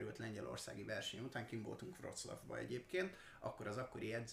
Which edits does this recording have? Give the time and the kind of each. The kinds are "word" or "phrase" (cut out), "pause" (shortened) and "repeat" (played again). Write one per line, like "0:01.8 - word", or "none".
none